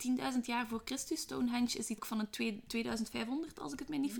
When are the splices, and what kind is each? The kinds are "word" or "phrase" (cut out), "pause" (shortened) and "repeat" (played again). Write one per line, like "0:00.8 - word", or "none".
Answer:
0:02.0 - word